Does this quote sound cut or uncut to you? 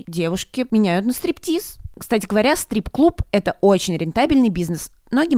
uncut